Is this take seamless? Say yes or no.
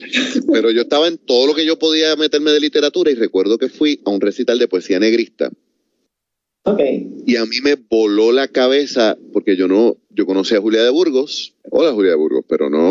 no